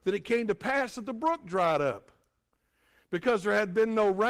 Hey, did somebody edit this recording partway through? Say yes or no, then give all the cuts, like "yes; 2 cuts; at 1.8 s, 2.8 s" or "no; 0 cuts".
no; 0 cuts